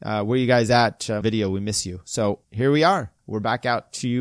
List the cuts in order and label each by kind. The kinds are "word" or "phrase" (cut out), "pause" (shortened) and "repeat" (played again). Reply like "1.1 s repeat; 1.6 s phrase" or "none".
1.2 s phrase; 2.4 s pause; 3.2 s pause